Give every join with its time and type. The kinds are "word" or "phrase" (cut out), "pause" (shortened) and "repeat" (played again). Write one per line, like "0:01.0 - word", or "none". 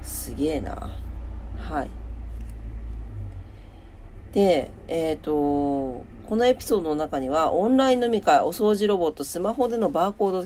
none